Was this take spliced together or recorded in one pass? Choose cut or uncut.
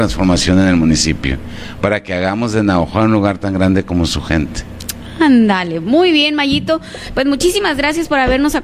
uncut